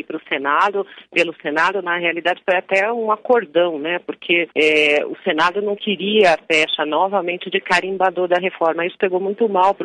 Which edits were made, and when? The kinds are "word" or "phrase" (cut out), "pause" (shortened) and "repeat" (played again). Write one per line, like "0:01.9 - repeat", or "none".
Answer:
0:04.5 - pause
0:06.4 - phrase